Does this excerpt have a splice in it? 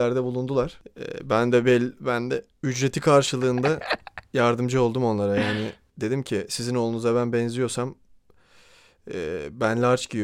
no; 0 cuts

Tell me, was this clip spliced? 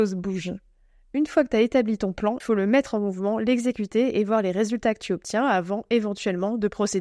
yes; 1 cut; at 2.4 s

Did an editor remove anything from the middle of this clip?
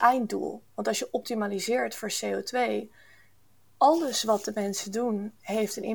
no; 0 cuts

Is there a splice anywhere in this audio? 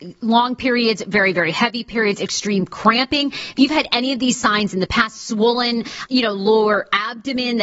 yes; 1 cut; at 6.1 s

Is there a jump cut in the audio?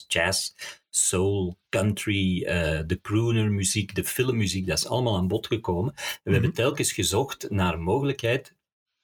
no; 0 cuts

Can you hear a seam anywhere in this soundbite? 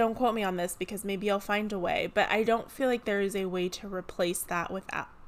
no; 0 cuts

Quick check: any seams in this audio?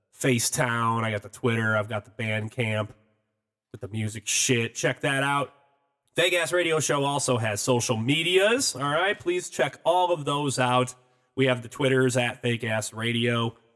no; 0 cuts

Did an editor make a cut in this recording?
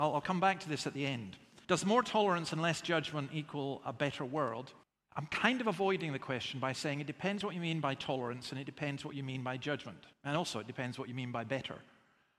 yes; 3 cuts; at 1.6 s, 4.8 s, 10.1 s

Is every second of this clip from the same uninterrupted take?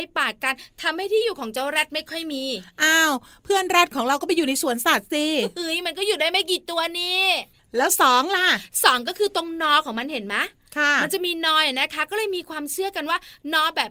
yes; 0 cuts

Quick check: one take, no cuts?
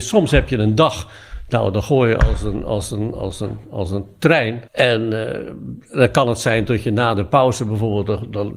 no; 1 cut; at 4.7 s

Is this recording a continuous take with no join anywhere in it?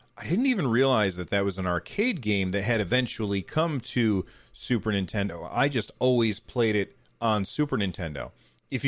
yes; 0 cuts

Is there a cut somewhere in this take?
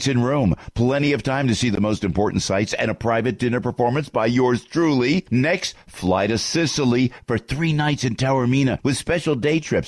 no; 0 cuts

